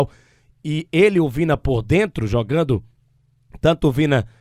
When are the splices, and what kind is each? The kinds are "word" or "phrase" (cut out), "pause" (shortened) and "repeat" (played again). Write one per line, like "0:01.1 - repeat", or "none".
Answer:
none